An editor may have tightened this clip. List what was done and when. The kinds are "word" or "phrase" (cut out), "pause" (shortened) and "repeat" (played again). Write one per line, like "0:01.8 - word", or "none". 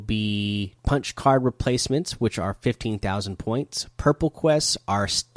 none